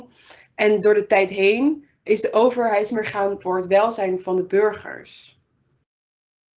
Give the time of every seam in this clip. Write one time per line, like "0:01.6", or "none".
0:02.1
0:02.9
0:03.4